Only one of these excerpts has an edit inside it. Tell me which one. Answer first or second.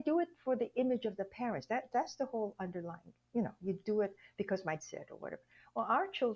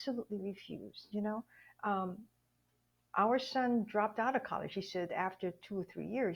first